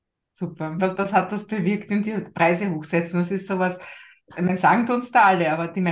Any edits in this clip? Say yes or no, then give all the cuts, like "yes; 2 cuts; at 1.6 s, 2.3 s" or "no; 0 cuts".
no; 0 cuts